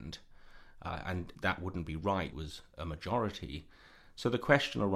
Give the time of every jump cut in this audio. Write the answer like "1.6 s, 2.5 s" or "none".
1.3 s, 2.3 s